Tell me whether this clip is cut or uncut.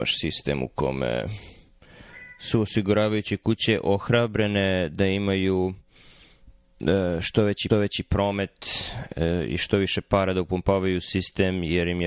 cut